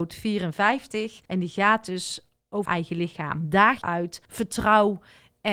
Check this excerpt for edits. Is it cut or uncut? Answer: cut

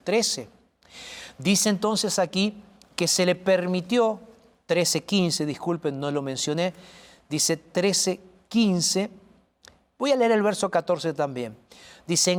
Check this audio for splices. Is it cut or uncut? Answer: uncut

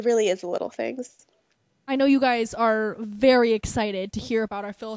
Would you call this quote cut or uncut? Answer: uncut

